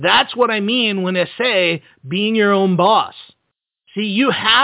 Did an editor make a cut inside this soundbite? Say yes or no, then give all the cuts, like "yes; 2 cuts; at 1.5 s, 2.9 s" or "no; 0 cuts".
no; 0 cuts